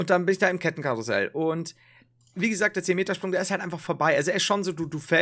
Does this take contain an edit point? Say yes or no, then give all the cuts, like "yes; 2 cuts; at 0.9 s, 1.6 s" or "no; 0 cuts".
no; 0 cuts